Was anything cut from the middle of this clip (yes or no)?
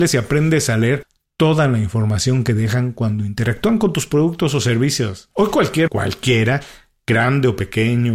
yes